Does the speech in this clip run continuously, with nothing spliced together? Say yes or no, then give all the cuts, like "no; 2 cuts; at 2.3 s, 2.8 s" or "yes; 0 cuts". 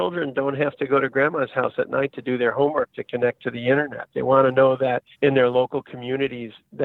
no; 1 cut; at 5.1 s